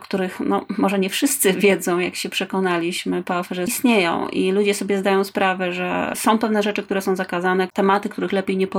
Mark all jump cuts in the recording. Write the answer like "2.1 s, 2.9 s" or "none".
3.7 s